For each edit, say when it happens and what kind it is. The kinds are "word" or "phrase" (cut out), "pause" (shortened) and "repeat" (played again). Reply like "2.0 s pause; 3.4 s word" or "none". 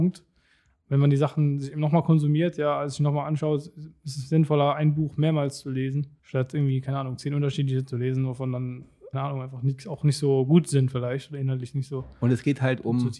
6.2 s pause; 9.1 s phrase